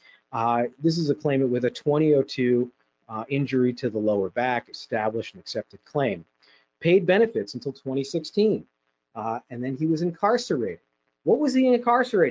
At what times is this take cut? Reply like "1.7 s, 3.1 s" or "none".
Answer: none